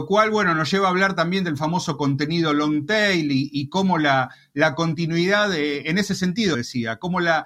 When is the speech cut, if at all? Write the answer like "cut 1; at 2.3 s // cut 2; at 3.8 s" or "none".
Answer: cut 1; at 6.5 s